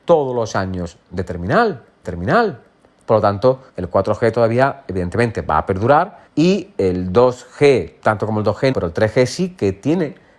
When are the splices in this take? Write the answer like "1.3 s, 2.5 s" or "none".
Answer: 2.0 s, 3.7 s, 6.3 s, 8.0 s, 8.7 s